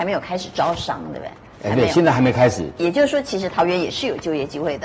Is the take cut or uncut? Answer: uncut